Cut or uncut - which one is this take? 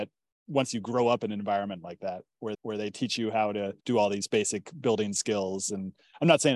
cut